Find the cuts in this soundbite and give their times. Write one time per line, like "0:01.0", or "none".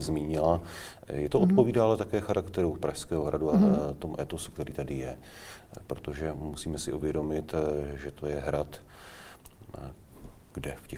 0:01.3

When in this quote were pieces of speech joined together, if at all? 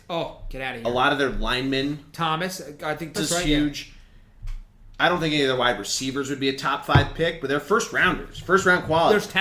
0:03.2

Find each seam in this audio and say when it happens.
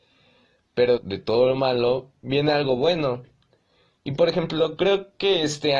0:01.0

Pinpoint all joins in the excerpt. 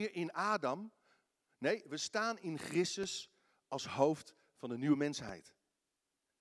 none

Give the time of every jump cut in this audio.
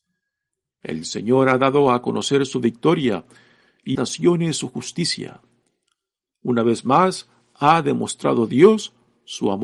0:03.9

